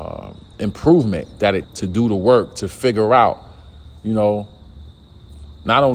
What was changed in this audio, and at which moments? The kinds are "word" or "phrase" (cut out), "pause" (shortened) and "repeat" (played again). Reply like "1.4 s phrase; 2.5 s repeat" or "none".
1.6 s word